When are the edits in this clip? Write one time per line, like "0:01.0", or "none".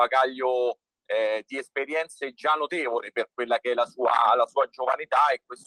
none